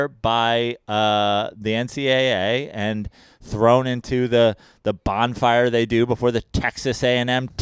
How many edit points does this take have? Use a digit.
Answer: 0